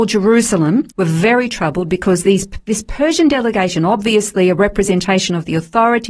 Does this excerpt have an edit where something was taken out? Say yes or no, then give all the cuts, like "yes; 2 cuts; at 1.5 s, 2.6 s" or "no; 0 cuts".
yes; 1 cut; at 0.9 s